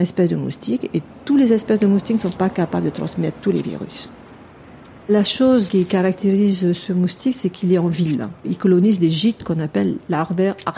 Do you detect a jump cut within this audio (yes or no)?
no